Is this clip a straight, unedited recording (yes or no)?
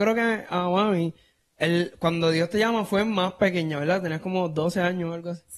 yes